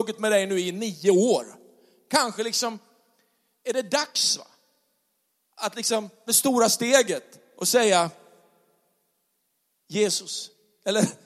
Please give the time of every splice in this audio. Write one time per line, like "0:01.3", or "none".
0:06.3